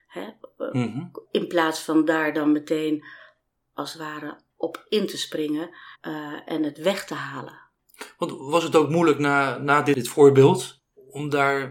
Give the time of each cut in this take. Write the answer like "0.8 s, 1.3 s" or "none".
1.2 s, 5.9 s

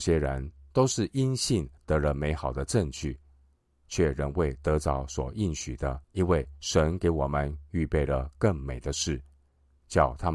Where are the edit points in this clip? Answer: 1.8 s, 6.0 s

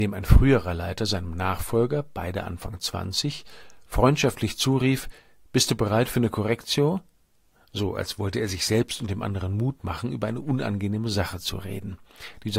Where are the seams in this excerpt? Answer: none

